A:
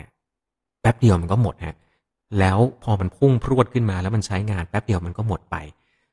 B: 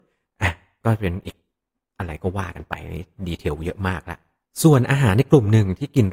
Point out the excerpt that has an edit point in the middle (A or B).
B